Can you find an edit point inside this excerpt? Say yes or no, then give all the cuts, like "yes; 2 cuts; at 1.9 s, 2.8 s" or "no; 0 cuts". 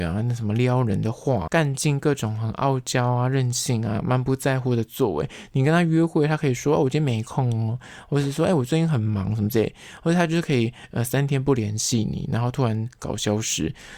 yes; 1 cut; at 1.5 s